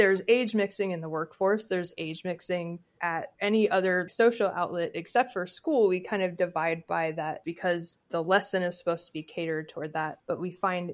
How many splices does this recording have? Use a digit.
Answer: 1